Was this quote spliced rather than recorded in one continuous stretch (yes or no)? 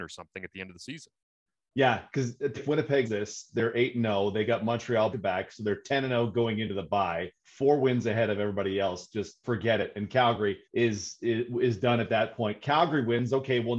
yes